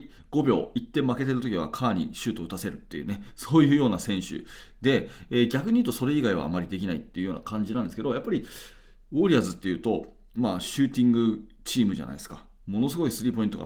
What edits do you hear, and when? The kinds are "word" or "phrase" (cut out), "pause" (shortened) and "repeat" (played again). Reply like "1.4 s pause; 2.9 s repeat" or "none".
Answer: none